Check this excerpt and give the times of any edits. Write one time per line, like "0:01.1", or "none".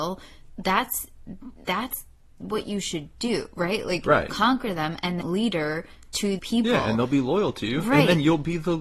0:01.6
0:05.2
0:06.4